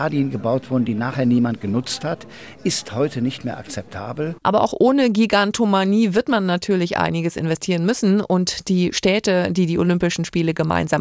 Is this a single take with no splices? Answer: yes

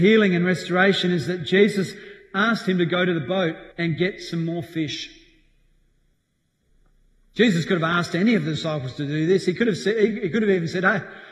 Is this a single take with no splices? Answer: no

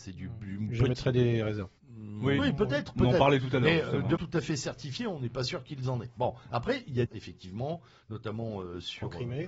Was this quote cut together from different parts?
yes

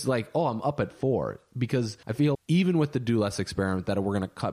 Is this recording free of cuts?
no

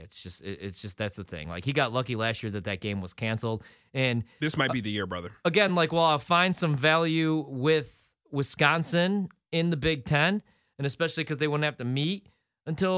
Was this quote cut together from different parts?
no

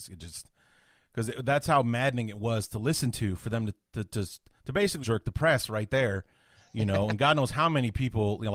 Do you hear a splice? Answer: yes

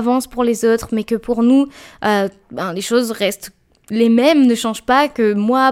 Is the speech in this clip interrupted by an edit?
no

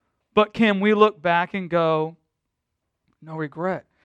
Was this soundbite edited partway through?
no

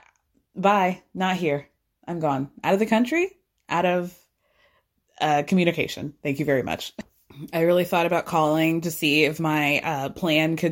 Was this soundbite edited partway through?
no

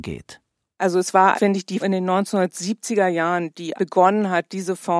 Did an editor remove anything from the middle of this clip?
yes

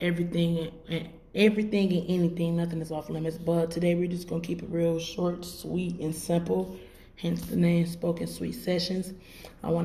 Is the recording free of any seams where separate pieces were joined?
yes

